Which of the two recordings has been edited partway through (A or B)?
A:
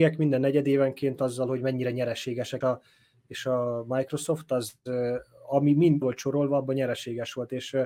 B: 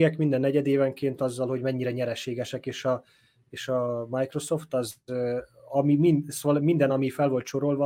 A